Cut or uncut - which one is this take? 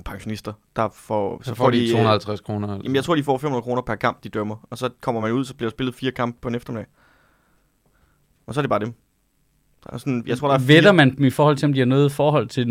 uncut